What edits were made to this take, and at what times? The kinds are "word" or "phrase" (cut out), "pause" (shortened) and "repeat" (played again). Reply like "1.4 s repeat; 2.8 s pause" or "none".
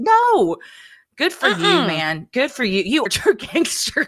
3.1 s word